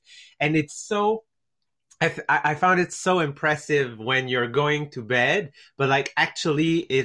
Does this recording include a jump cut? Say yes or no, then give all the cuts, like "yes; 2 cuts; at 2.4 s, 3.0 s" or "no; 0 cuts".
no; 0 cuts